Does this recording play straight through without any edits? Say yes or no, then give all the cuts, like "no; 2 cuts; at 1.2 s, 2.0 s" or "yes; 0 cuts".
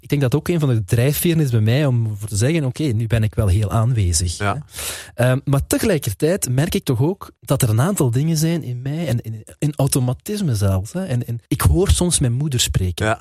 no; 2 cuts; at 7.4 s, 11.5 s